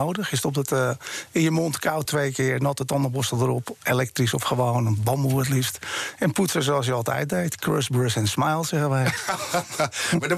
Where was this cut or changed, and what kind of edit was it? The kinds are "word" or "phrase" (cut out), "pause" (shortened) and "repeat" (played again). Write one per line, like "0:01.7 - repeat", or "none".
none